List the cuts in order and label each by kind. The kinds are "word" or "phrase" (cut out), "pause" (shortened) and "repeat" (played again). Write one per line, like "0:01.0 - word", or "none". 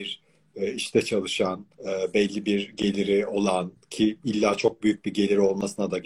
0:01.7 - pause